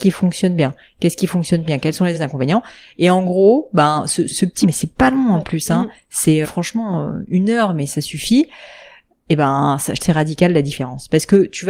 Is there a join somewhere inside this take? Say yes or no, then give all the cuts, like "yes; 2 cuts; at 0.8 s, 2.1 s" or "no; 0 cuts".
yes; 6 cuts; at 1.7 s, 2.1 s, 4.3 s, 4.6 s, 6.4 s, 10.0 s